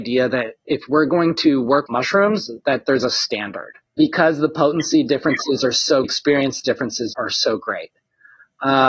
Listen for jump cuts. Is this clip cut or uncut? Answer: cut